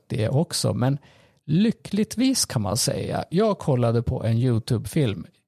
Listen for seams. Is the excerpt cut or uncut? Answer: uncut